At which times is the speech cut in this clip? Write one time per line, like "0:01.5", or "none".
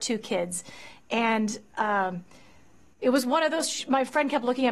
none